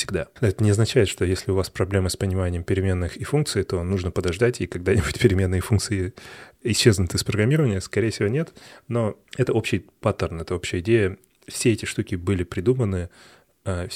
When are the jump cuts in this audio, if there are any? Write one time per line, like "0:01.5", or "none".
none